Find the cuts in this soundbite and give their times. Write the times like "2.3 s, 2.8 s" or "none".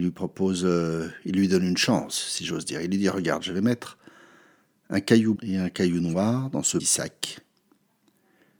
5.4 s, 6.8 s